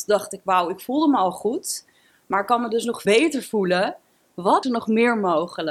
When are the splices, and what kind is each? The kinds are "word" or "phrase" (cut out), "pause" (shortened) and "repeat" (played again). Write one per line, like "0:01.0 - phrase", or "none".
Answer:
0:03.0 - word
0:04.6 - word